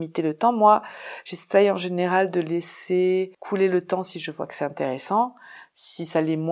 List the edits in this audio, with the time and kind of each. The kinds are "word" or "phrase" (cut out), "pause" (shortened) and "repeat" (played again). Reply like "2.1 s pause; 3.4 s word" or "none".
3.3 s pause